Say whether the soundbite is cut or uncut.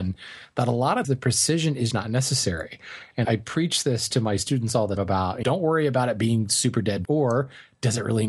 cut